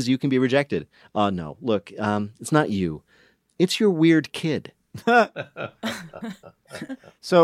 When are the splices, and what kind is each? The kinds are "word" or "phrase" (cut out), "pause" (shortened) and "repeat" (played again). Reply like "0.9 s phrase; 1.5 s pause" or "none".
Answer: none